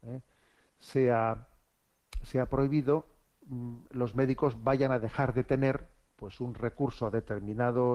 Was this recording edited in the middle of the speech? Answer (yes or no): no